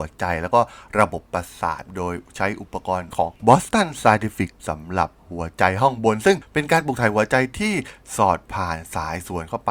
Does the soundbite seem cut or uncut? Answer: cut